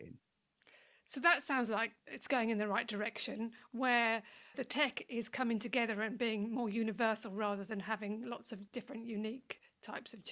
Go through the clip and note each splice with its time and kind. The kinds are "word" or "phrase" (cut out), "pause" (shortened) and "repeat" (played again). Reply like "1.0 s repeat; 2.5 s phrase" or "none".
2.0 s pause